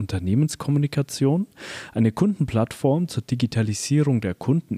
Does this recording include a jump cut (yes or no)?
no